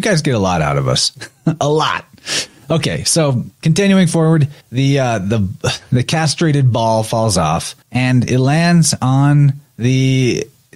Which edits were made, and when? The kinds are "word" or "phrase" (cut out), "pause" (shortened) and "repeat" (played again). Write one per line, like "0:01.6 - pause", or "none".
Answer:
0:01.3 - pause
0:04.6 - pause
0:07.8 - pause